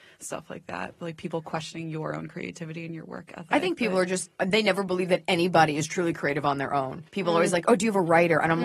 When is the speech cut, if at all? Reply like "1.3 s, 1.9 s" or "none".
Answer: 4.4 s, 7.1 s